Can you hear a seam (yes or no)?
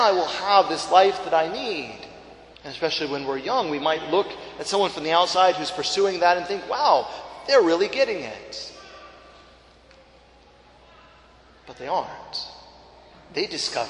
yes